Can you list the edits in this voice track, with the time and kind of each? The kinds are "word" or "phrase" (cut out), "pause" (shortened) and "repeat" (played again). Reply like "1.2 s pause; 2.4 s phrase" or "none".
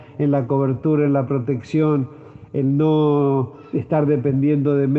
none